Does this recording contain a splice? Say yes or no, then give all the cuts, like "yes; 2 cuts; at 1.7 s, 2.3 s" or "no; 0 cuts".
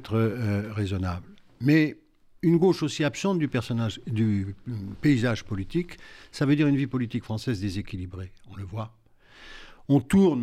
no; 0 cuts